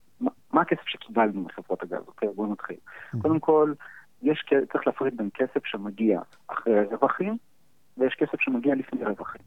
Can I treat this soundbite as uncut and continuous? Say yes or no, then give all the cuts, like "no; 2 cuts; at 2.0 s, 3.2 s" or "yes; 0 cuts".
no; 1 cut; at 6.3 s